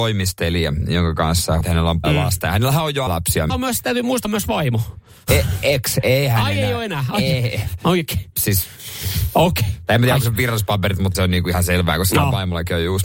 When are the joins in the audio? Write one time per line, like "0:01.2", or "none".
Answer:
0:01.6
0:02.0
0:03.1
0:03.5
0:04.2
0:11.1